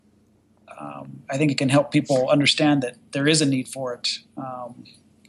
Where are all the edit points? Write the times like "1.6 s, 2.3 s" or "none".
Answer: none